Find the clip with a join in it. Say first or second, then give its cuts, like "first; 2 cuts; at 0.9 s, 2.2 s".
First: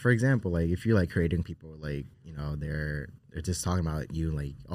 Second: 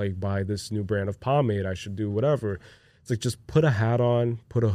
first; 3 cuts; at 1.4 s, 2.1 s, 3.2 s